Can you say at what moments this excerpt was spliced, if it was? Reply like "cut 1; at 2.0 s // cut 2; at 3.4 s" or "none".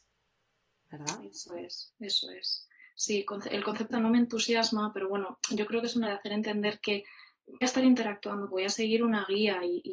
cut 1; at 3.9 s // cut 2; at 6.0 s // cut 3; at 7.6 s // cut 4; at 8.5 s